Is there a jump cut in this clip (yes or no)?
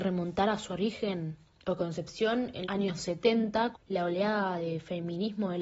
yes